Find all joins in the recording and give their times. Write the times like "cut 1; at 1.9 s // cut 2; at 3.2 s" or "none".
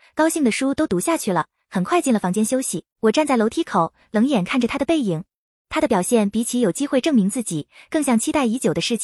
cut 1; at 2.9 s